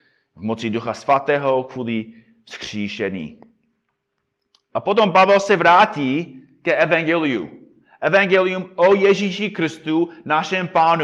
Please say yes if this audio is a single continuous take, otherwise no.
yes